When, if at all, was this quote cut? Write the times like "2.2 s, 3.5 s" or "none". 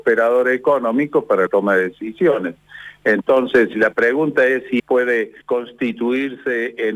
1.5 s, 3.7 s, 4.8 s, 5.4 s

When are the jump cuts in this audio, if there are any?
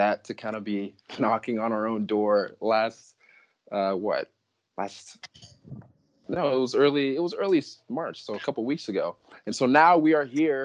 none

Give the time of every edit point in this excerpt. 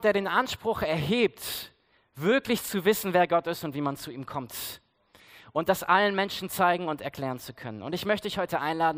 none

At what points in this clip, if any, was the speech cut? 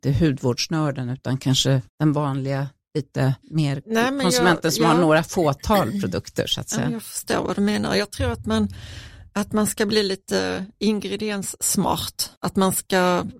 1.9 s, 3.4 s, 12.4 s

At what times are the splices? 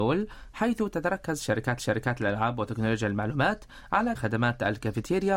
1.8 s, 4.2 s

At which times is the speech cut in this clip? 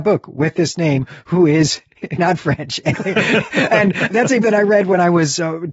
2.2 s, 2.9 s, 4.4 s

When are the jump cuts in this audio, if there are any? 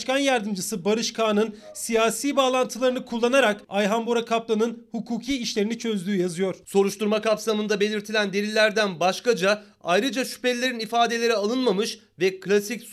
3.6 s

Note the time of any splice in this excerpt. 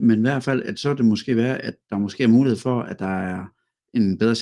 1.8 s

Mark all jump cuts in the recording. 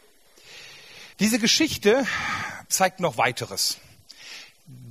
1.1 s, 2.7 s

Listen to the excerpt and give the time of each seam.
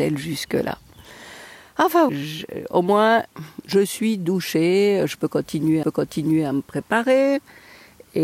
2.1 s, 5.8 s

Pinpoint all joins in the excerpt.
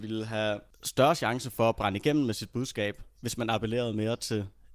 none

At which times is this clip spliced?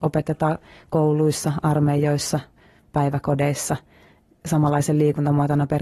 none

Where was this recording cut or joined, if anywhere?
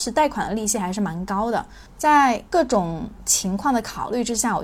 1.9 s

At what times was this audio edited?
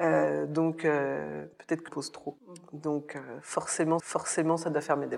1.5 s, 1.9 s, 2.4 s, 4.0 s

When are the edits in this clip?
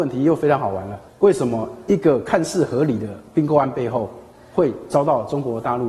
1.1 s

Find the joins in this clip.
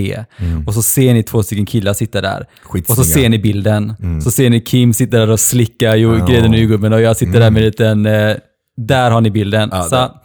none

